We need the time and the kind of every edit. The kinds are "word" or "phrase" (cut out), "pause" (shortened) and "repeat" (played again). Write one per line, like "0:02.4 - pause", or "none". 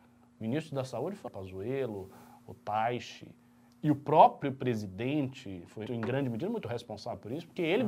0:01.3 - word
0:05.9 - word